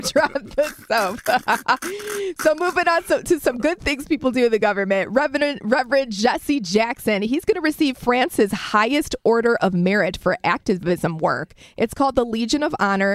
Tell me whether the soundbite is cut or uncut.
uncut